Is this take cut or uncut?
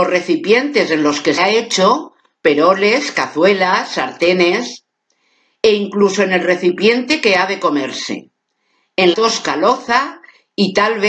cut